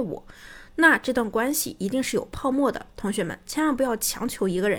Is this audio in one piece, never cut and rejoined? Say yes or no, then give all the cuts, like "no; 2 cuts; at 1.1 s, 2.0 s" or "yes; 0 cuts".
no; 1 cut; at 2.9 s